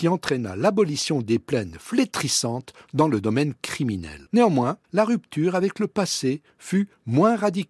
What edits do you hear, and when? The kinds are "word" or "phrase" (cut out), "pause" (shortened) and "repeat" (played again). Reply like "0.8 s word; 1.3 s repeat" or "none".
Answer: 4.8 s pause